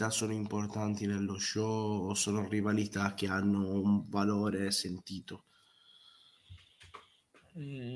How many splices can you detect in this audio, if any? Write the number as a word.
zero